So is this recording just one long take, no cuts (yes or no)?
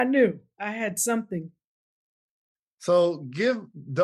yes